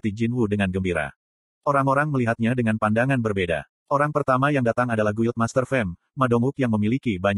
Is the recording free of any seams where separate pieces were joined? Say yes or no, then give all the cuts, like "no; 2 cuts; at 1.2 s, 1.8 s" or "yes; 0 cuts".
yes; 0 cuts